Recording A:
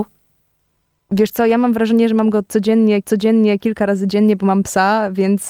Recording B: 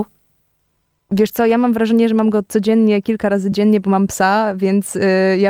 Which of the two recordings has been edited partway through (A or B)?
A